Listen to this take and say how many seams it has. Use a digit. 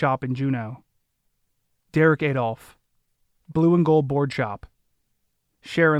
0